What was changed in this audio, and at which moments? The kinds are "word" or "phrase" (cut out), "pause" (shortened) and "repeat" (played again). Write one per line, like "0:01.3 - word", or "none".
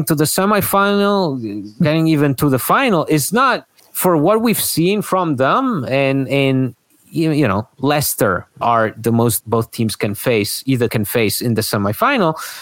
0:03.8 - pause
0:06.9 - pause
0:08.6 - phrase
0:09.4 - phrase
0:10.9 - word